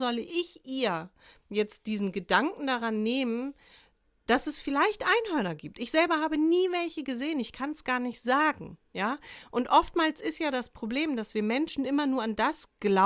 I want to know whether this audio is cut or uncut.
uncut